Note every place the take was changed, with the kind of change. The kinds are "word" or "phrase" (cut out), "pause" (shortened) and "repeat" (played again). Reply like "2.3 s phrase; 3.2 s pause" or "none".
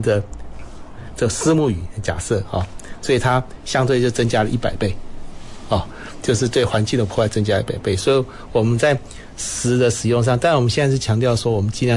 none